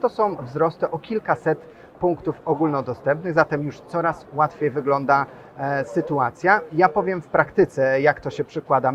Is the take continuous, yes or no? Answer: yes